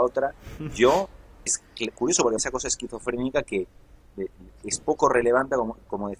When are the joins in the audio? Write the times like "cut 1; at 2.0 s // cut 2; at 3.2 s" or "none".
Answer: cut 1; at 1.5 s // cut 2; at 2.4 s